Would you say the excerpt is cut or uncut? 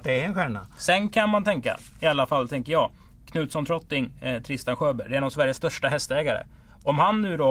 uncut